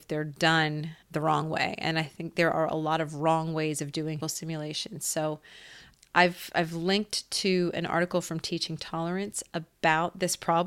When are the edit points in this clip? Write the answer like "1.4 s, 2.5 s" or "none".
1.0 s, 4.2 s, 5.9 s